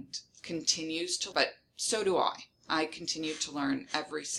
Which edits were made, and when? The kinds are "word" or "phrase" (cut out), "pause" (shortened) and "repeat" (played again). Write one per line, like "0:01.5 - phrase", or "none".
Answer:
0:01.3 - word